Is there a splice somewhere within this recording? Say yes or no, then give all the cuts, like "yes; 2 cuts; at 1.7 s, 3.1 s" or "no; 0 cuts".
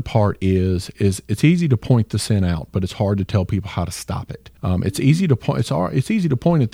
yes; 1 cut; at 4.6 s